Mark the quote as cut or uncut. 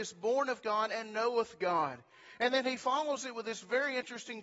uncut